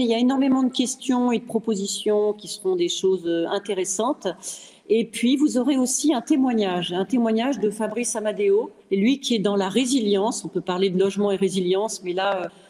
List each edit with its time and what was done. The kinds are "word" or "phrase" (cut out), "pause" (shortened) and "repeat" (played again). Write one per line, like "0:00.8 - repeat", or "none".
0:08.8 - pause